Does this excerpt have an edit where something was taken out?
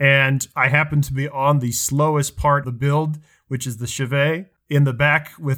yes; 1 cut; at 2.6 s

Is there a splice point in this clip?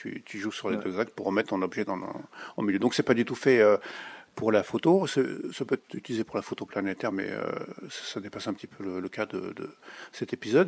no; 0 cuts

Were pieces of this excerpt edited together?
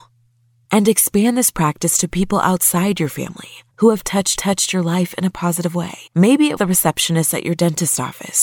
yes; 4 cuts; at 3.7 s, 4.3 s, 6.1 s, 6.6 s

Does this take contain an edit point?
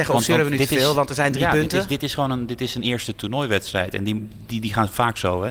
no; 0 cuts

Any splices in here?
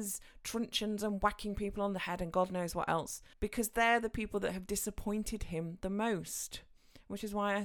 yes; 1 cut; at 3.3 s

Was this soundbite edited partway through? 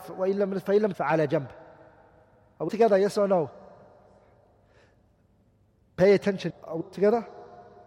yes; 4 cuts; at 0.9 s, 2.7 s, 6.5 s, 6.8 s

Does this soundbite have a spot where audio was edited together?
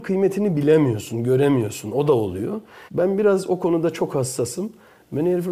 yes; 1 cut; at 2.9 s

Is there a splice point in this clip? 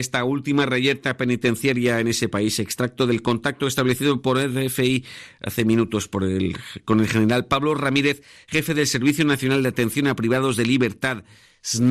no; 0 cuts

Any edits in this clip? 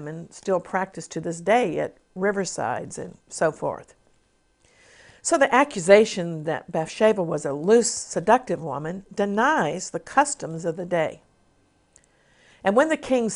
no; 0 cuts

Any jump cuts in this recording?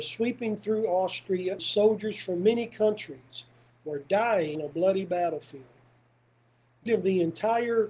yes; 3 cuts; at 1.6 s, 4.5 s, 6.9 s

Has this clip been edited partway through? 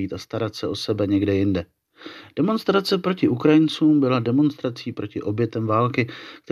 no; 0 cuts

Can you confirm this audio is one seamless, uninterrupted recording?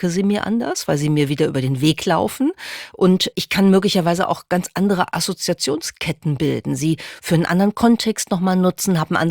no; 1 cut; at 3.3 s

